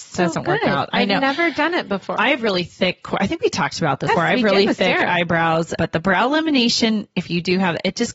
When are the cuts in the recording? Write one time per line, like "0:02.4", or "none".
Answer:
0:02.2
0:04.1
0:05.8